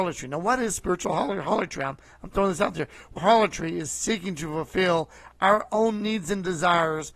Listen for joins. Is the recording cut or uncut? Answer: cut